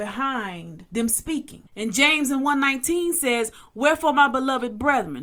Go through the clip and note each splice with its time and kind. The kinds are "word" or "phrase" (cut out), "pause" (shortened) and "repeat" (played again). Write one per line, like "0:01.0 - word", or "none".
0:01.7 - pause